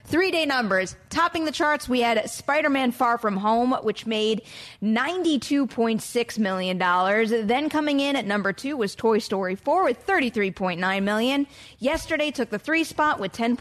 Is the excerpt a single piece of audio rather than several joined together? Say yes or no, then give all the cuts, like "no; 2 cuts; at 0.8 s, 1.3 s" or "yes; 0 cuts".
yes; 0 cuts